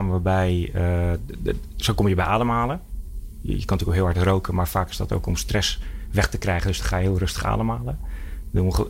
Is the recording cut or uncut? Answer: uncut